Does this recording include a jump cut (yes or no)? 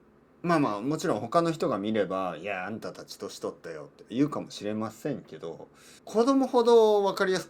yes